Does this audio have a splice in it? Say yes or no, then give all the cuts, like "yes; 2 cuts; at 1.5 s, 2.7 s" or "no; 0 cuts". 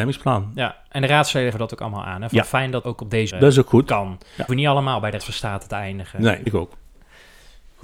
yes; 6 cuts; at 1.5 s, 2.8 s, 3.3 s, 4.5 s, 5.2 s, 6.5 s